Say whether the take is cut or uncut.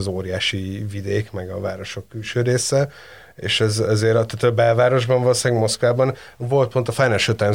uncut